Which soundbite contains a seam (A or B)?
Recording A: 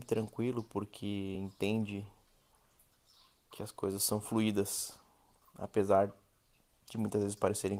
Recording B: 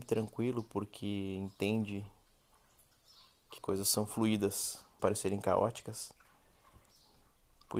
B